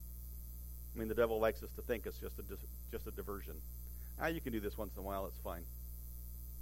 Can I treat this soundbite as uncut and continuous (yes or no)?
yes